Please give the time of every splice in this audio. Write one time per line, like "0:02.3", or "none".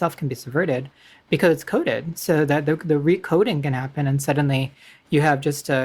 none